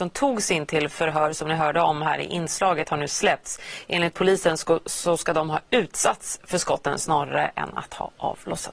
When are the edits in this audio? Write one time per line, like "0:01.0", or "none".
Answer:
none